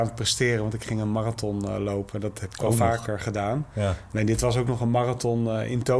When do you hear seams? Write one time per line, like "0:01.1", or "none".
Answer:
none

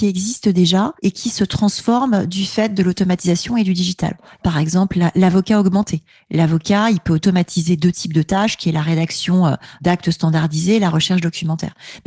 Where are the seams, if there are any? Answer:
none

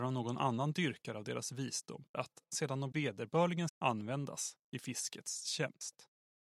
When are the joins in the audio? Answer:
0:02.1
0:02.9
0:03.7

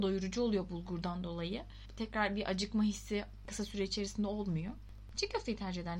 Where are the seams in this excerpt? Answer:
none

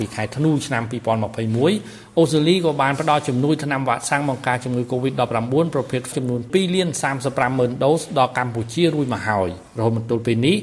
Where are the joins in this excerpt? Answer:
0:06.1
0:09.7

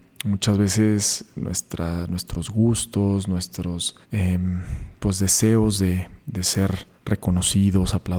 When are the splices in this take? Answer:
0:04.0
0:07.0

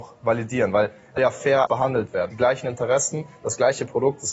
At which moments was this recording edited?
0:01.2
0:01.7
0:02.3

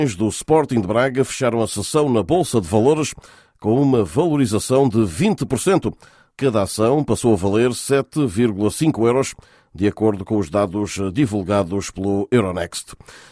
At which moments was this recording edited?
none

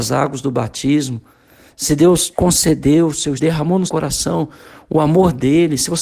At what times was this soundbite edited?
0:02.3
0:03.4
0:03.9

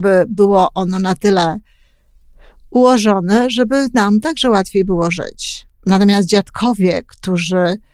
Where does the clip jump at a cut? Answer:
none

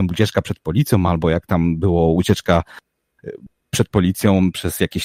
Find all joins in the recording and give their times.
none

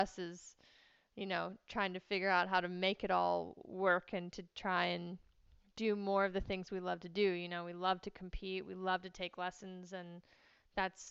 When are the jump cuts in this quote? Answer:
none

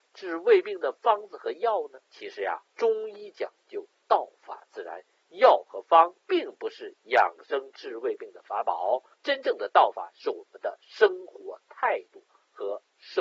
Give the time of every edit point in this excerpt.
0:02.1
0:02.7
0:06.2
0:09.1

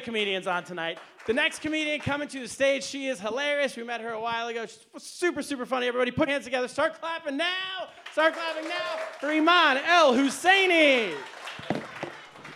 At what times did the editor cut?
0:06.3

